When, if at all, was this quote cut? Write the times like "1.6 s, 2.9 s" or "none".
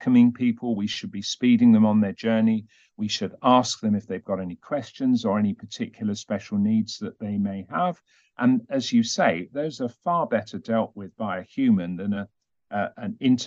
none